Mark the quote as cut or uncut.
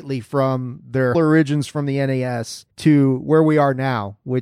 cut